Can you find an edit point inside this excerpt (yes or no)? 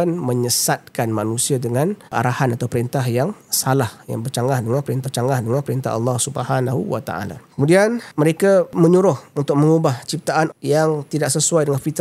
yes